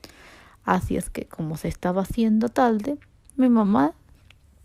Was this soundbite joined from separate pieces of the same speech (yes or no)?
no